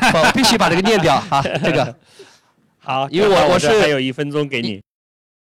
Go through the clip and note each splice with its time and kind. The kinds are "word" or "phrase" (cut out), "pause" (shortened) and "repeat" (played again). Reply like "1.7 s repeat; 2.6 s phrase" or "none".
none